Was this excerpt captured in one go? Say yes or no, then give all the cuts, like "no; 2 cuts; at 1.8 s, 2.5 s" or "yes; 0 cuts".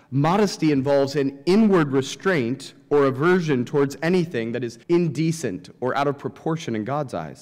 no; 1 cut; at 4.8 s